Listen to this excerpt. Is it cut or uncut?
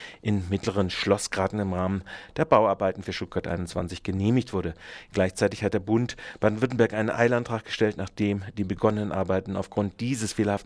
uncut